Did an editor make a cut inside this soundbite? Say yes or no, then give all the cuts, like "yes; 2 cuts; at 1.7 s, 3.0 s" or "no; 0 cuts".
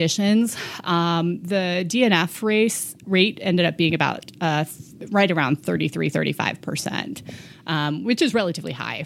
no; 0 cuts